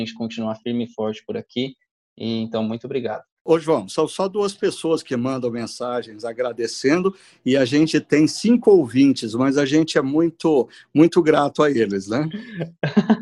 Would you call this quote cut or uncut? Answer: uncut